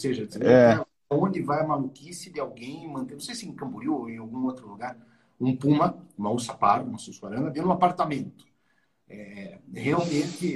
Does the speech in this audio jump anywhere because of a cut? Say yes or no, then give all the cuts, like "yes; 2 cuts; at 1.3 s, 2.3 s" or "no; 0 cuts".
no; 0 cuts